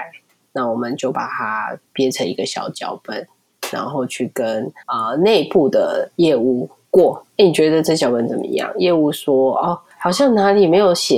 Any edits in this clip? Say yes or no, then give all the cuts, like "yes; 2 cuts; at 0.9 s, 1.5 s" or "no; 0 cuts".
yes; 3 cuts; at 1.9 s, 4.8 s, 7.3 s